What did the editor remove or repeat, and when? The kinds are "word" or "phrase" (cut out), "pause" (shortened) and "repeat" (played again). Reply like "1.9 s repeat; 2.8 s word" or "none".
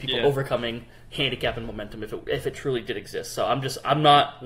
none